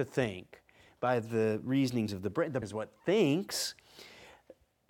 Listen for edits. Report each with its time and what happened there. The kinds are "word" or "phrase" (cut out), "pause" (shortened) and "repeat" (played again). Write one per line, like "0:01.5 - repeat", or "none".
0:02.1 - word
0:02.6 - word